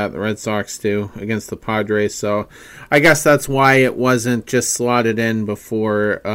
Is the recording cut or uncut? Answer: uncut